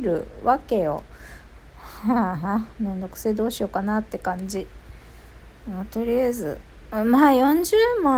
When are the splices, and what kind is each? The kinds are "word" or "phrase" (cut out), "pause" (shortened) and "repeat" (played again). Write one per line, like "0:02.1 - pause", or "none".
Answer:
none